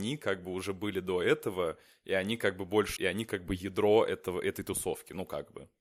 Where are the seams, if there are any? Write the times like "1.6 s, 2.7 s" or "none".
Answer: 3.0 s